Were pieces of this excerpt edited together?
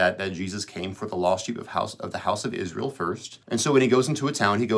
yes; 1 cut; at 3.4 s

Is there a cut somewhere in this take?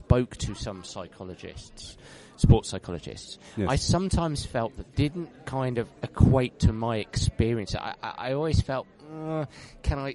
yes; 1 cut; at 4.9 s

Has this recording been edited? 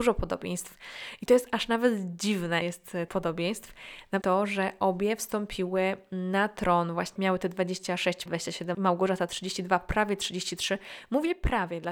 yes; 6 cuts; at 2.6 s, 3.1 s, 4.2 s, 7.2 s, 8.3 s, 8.7 s

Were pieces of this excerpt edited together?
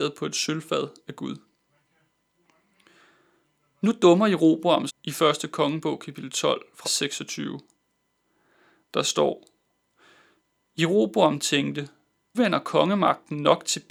yes; 3 cuts; at 4.9 s, 6.8 s, 12.3 s

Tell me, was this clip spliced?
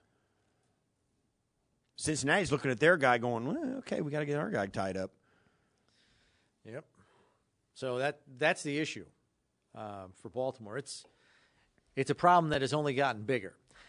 no; 0 cuts

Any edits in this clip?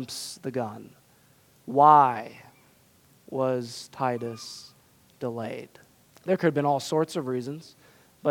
yes; 1 cut; at 6.0 s

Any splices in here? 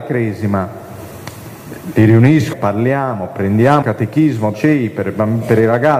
yes; 3 cuts; at 2.5 s, 3.8 s, 4.5 s

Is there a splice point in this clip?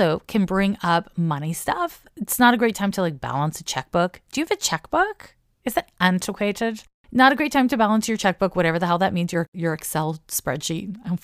no; 0 cuts

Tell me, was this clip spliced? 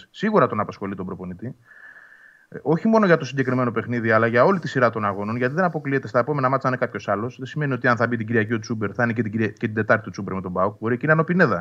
no; 0 cuts

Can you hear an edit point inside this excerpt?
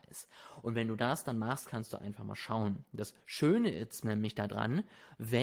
yes; 1 cut; at 3.2 s

